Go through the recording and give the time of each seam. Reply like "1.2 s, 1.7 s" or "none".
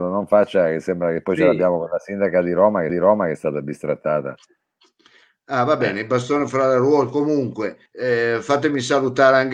2.9 s, 7.9 s